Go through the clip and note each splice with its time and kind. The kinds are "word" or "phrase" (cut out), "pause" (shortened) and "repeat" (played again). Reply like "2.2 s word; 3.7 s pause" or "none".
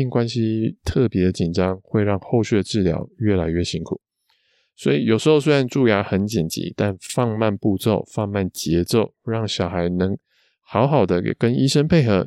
none